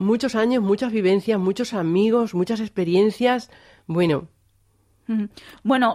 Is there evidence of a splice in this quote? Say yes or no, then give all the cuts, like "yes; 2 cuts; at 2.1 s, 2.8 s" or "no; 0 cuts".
no; 0 cuts